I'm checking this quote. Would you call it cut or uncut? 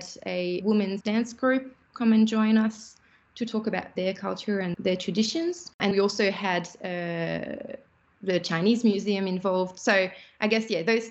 cut